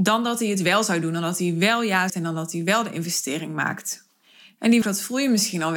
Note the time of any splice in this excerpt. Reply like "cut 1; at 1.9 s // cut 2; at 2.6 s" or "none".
cut 1; at 2.1 s // cut 2; at 4.8 s